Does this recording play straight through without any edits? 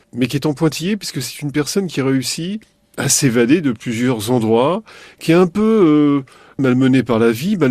yes; 0 cuts

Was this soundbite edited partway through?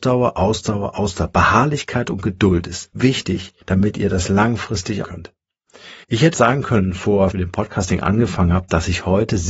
yes; 6 cuts; at 2.9 s, 3.6 s, 5.0 s, 6.0 s, 6.3 s, 7.3 s

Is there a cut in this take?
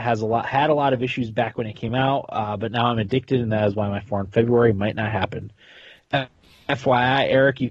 no; 0 cuts

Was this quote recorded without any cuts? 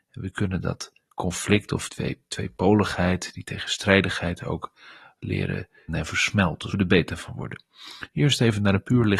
no; 3 cuts; at 1.9 s, 5.9 s, 6.7 s

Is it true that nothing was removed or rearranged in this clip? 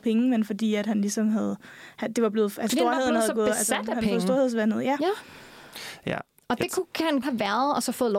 no; 2 cuts; at 2.7 s, 7.2 s

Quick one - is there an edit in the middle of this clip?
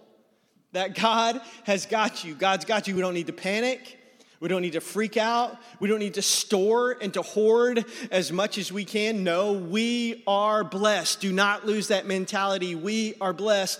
no; 0 cuts

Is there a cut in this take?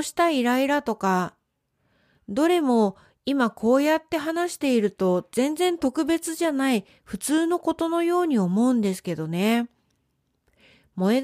no; 0 cuts

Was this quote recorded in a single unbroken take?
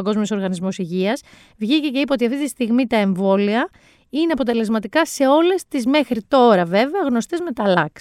yes; 0 cuts

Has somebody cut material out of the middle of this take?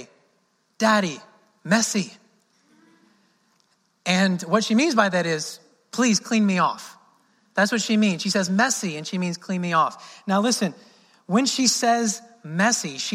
no; 0 cuts

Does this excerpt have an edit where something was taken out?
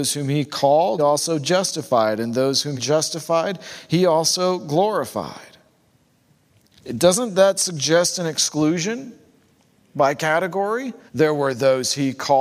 yes; 3 cuts; at 1.0 s, 2.8 s, 11.1 s

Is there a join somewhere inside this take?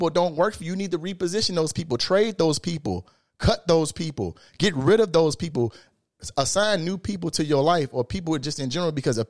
no; 0 cuts

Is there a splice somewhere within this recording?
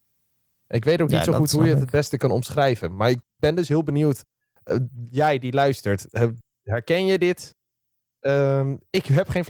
no; 0 cuts

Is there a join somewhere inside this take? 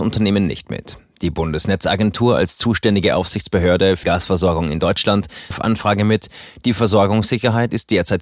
yes; 2 cuts; at 4.0 s, 5.5 s

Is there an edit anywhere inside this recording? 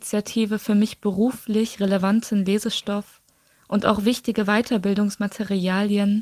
no; 0 cuts

